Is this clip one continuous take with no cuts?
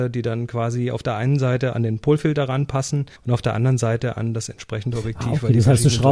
no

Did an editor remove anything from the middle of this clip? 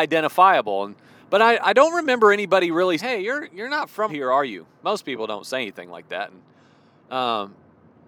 yes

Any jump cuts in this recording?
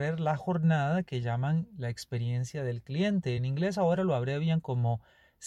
no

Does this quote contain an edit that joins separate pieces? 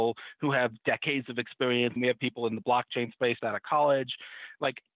yes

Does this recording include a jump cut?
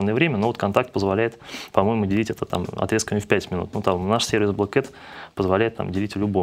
no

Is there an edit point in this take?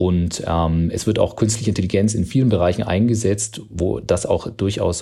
no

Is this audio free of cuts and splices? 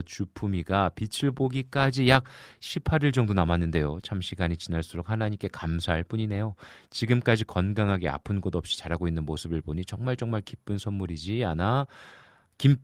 yes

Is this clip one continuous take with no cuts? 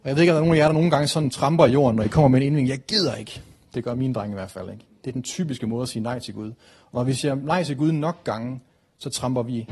yes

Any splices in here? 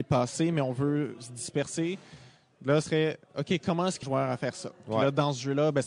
yes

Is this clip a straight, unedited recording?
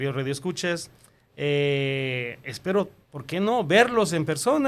yes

